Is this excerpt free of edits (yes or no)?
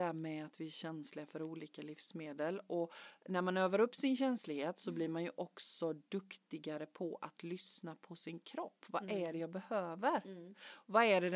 yes